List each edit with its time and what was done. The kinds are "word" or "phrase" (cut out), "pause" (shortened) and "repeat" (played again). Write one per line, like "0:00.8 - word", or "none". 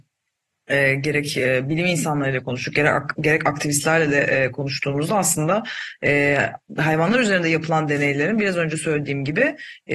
none